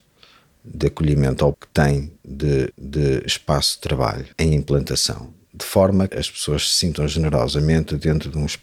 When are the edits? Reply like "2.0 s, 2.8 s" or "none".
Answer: 1.5 s, 2.7 s, 4.3 s, 6.1 s